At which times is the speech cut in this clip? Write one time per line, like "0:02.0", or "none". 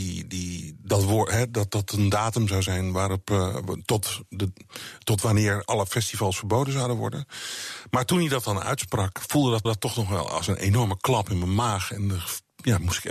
0:01.7
0:09.6